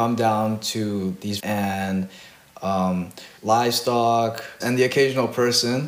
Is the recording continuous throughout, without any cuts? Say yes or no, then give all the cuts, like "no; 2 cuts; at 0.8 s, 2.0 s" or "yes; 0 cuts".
no; 3 cuts; at 1.4 s, 3.4 s, 4.6 s